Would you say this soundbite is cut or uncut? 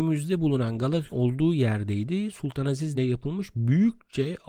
cut